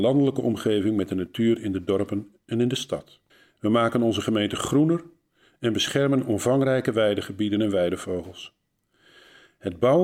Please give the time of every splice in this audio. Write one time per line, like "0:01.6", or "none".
0:03.3